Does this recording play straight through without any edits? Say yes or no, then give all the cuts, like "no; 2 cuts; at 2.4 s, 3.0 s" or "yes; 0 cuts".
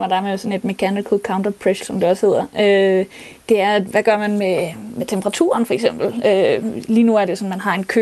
no; 2 cuts; at 1.8 s, 3.9 s